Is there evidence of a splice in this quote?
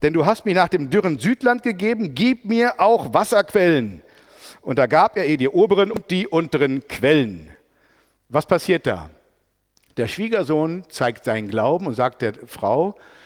no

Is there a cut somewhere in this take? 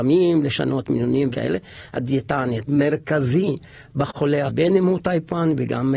yes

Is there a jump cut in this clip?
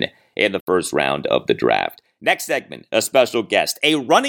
no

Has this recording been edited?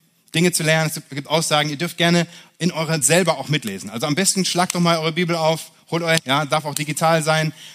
yes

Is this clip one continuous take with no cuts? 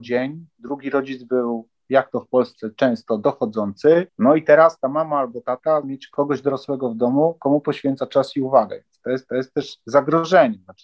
no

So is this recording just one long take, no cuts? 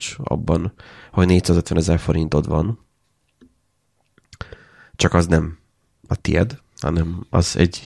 yes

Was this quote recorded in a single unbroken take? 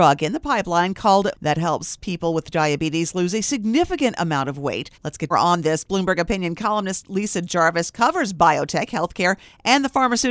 no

